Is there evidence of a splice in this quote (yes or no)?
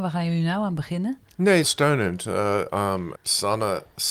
yes